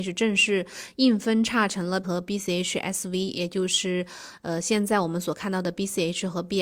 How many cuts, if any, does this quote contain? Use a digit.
1